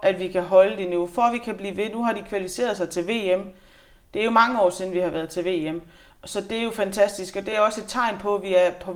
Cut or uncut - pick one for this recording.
uncut